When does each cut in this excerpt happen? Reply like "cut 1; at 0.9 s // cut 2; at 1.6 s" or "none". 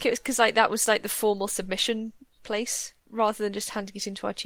none